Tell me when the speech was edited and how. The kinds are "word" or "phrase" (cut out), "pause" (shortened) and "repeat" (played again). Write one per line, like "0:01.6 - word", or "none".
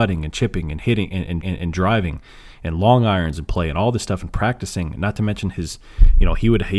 0:01.4 - repeat